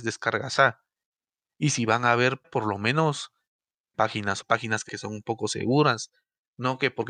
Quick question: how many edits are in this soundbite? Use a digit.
4